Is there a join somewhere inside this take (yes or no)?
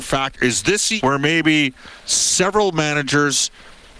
yes